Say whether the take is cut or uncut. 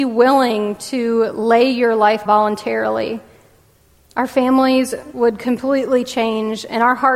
cut